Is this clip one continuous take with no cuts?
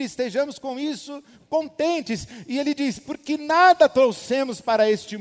yes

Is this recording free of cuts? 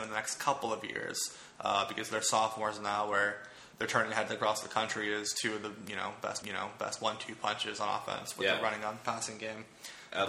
no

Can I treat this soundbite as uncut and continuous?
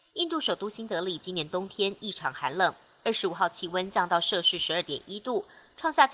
yes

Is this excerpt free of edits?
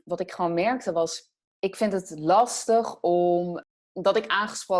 yes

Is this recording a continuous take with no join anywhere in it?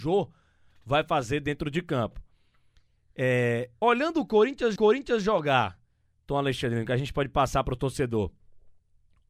no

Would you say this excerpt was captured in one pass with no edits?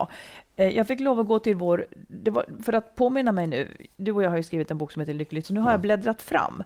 no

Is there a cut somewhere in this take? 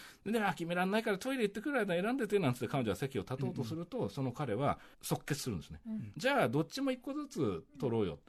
yes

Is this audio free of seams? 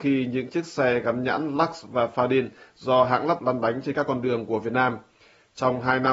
no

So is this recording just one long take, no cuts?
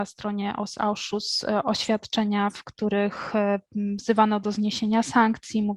yes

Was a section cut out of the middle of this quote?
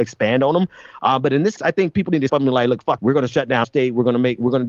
yes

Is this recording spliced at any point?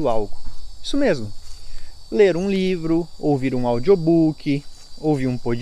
no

